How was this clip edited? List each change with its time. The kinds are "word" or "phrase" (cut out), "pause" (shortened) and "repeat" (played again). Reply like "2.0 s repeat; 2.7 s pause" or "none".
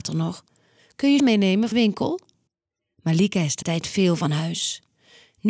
1.2 s word; 1.7 s phrase; 2.5 s pause; 3.6 s word